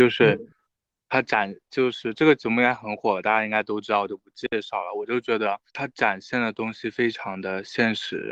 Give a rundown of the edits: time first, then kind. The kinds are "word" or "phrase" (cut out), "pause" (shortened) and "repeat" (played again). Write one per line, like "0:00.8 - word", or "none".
0:05.7 - pause